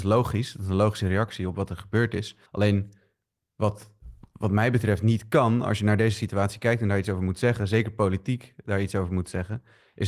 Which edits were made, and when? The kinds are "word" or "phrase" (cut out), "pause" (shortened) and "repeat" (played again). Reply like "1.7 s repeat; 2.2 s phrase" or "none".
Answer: 2.5 s pause